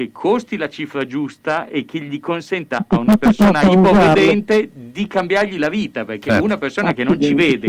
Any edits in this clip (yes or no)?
no